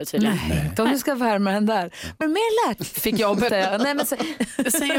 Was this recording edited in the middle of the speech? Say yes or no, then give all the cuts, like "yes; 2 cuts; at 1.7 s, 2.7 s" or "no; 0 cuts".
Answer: yes; 3 cuts; at 2.2 s, 2.8 s, 3.5 s